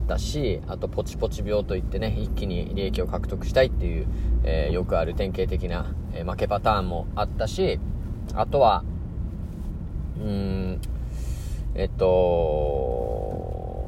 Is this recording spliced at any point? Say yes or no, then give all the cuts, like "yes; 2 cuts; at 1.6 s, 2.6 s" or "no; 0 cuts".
no; 0 cuts